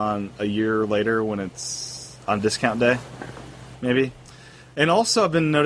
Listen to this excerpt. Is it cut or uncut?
uncut